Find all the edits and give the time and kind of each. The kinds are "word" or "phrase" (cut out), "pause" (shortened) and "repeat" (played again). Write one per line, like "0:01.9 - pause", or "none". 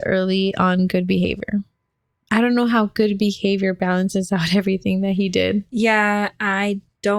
none